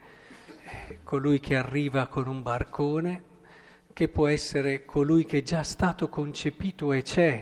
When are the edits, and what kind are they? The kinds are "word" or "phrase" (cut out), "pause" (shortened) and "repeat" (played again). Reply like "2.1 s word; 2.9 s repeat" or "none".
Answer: none